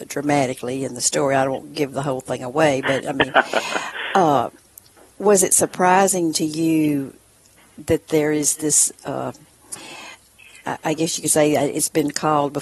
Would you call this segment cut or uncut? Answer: uncut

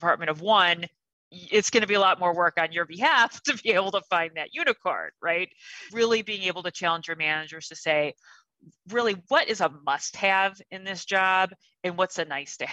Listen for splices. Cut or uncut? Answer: cut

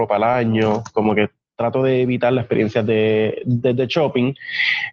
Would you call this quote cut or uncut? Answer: uncut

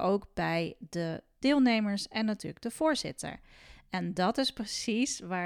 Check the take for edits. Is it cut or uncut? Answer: uncut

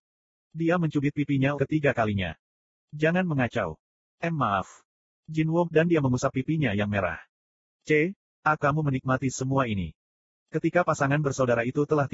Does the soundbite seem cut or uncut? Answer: cut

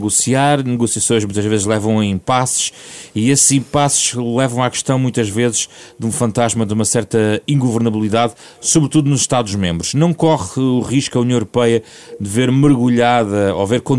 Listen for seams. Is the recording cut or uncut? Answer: uncut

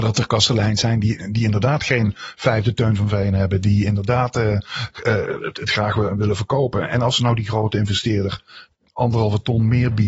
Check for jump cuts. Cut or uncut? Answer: uncut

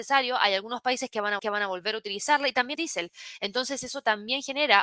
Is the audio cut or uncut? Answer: cut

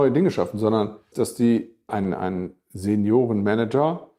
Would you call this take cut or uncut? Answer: cut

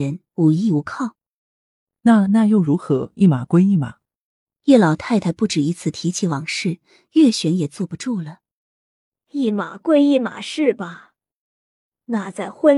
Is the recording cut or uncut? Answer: uncut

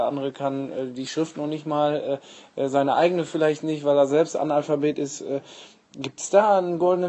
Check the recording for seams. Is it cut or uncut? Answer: uncut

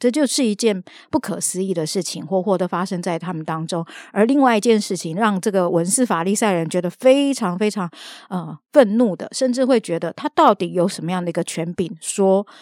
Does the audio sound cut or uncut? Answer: uncut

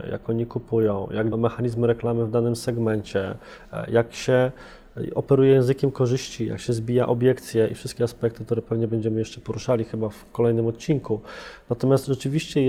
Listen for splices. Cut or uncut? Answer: cut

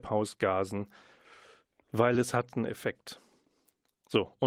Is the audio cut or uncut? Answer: uncut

